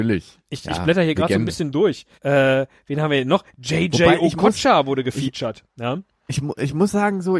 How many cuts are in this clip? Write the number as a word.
one